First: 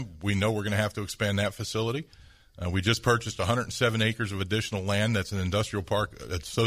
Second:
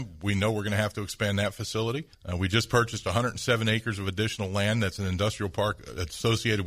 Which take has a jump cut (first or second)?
second